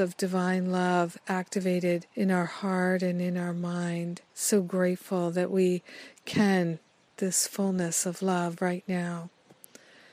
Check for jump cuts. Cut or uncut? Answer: cut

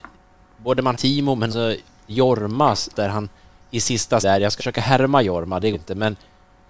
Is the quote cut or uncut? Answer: cut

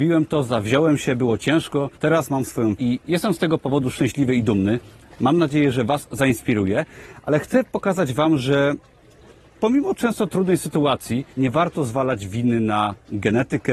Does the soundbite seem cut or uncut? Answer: cut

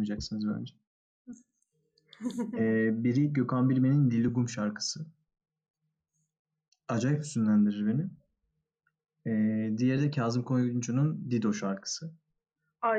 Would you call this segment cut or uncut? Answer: uncut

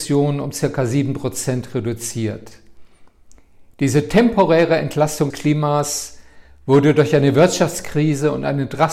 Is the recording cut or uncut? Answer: cut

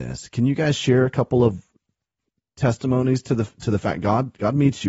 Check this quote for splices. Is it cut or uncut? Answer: uncut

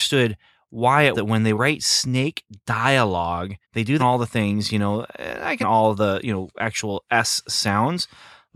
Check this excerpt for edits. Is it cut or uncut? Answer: cut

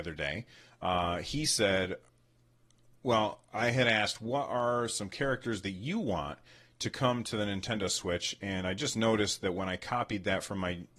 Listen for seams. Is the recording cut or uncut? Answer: uncut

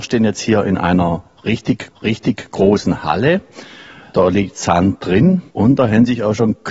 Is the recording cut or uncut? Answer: cut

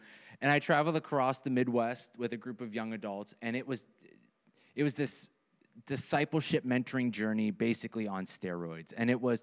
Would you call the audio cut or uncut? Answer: uncut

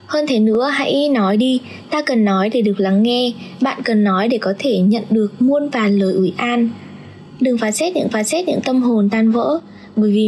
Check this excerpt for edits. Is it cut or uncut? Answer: cut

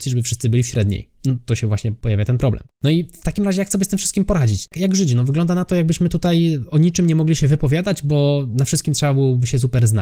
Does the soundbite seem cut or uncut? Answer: uncut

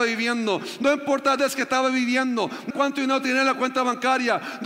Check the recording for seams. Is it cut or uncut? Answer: cut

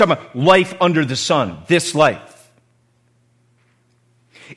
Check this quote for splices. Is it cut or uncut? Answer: uncut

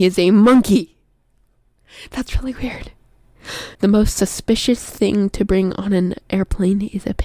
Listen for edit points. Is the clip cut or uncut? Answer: cut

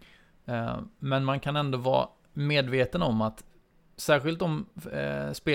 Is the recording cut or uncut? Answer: uncut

